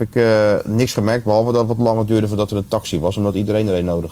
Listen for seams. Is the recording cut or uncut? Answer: uncut